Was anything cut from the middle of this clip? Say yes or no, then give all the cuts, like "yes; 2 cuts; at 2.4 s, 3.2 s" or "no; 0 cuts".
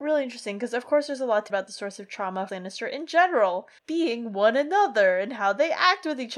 yes; 3 cuts; at 1.5 s, 2.5 s, 3.8 s